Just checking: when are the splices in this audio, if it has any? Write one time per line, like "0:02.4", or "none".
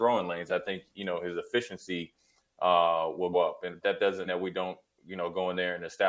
0:03.3
0:03.8
0:04.2